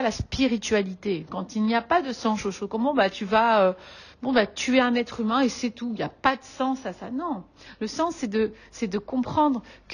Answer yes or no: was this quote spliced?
no